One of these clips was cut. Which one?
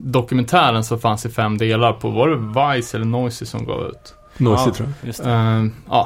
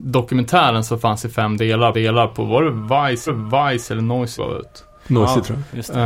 second; 3 cuts; at 1.9 s, 3.3 s, 4.4 s

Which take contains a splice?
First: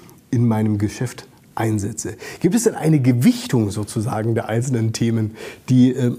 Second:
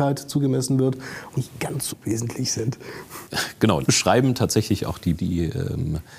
second; 4 cuts; at 1.3 s, 1.9 s, 3.8 s, 5.2 s

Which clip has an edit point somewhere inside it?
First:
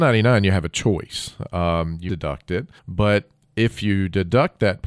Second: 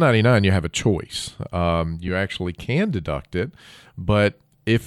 first; 2 cuts; at 2.1 s, 2.8 s

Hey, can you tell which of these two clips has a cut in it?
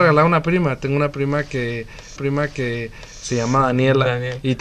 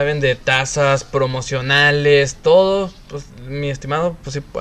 first; 1 cut; at 2.2 s

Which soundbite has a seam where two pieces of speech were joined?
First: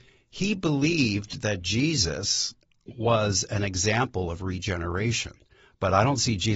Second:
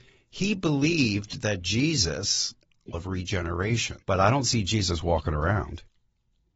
second; 2 cuts; at 2.9 s, 4.0 s

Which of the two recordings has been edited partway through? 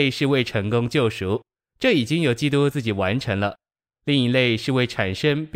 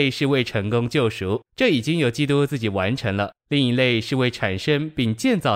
second; 2 cuts; at 1.5 s, 3.4 s

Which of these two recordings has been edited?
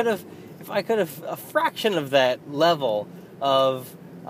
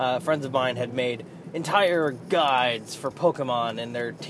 first; 1 cut; at 2.4 s

